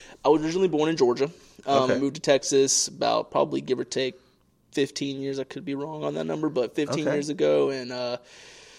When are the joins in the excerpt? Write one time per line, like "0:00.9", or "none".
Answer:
none